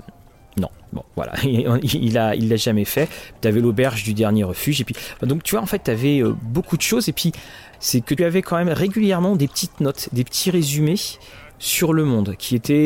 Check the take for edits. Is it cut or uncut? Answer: cut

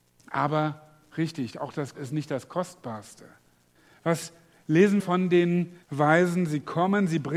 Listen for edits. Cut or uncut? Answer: cut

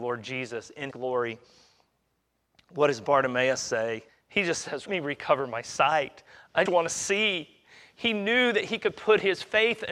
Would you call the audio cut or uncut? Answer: cut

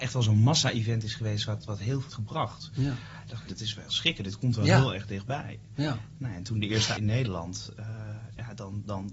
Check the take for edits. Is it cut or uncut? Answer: cut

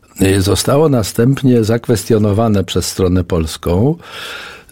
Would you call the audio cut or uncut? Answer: uncut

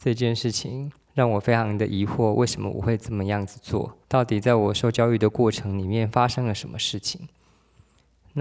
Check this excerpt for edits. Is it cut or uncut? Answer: cut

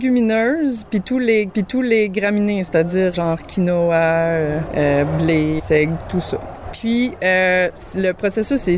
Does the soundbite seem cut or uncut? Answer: cut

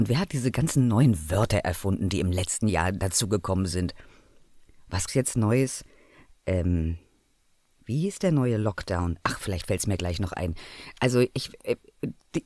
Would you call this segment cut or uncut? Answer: cut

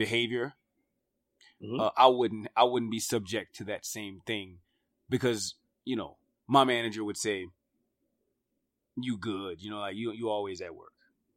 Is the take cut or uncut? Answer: uncut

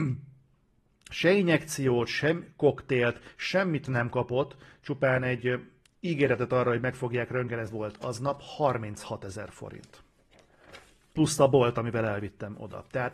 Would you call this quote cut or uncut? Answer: cut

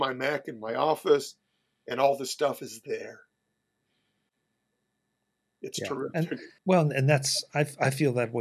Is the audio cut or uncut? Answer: cut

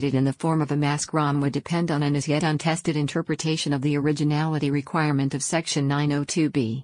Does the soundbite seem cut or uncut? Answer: uncut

